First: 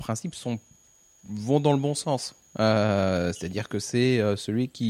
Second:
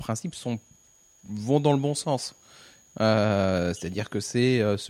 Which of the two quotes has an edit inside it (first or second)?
first